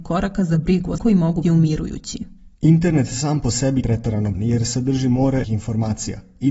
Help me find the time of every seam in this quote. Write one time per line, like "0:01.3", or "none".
0:01.0
0:01.4
0:02.5
0:03.8
0:04.3
0:05.4